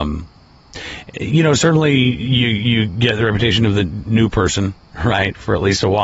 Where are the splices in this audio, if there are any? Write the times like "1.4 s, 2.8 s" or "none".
none